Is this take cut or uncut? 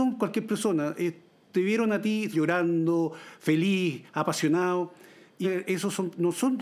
cut